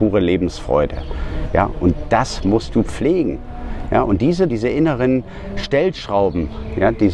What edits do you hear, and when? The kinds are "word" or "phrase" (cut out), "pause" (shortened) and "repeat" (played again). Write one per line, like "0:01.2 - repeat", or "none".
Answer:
0:04.5 - phrase